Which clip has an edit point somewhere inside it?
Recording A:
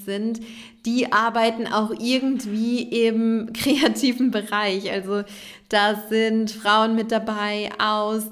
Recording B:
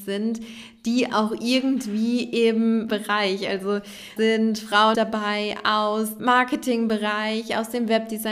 B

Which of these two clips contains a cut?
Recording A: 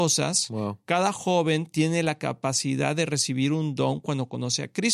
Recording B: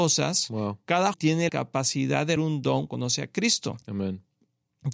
B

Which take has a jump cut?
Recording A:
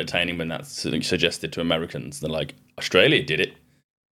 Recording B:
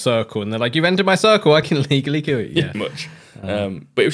B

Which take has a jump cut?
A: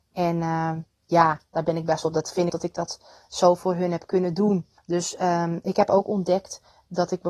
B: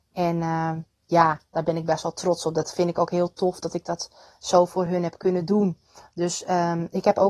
A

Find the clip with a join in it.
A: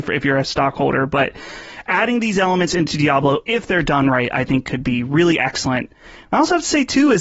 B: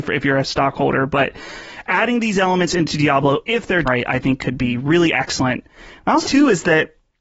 B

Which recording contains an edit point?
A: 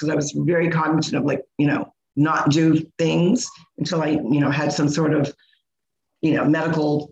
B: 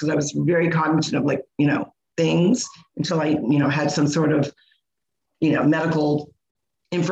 B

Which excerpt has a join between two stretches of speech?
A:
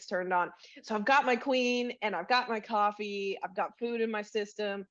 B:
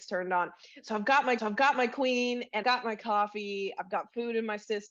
B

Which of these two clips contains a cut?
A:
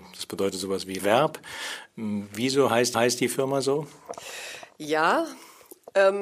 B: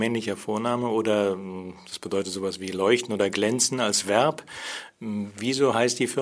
A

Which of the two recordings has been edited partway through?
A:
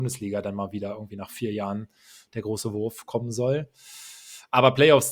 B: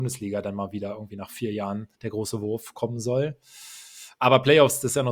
B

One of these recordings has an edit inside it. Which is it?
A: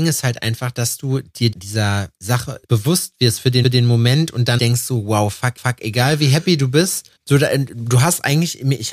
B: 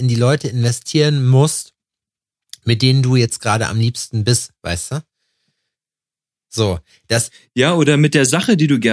A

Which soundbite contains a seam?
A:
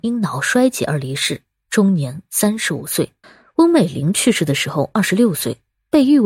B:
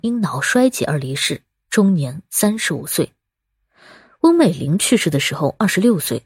A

